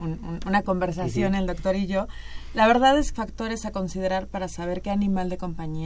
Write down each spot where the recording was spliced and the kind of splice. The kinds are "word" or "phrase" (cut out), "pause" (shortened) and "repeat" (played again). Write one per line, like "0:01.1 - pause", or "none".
0:03.2 - phrase